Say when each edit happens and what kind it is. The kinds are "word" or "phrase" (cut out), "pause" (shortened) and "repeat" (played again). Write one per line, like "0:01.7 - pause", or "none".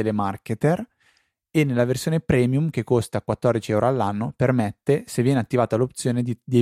none